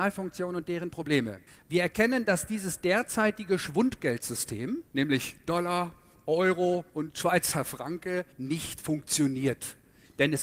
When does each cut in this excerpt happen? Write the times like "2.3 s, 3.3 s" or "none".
1.5 s, 4.9 s, 6.9 s, 8.3 s